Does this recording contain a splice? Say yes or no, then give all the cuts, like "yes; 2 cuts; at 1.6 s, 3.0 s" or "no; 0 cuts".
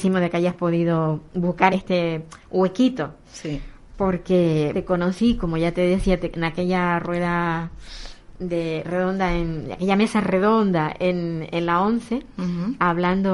yes; 2 cuts; at 1.7 s, 4.7 s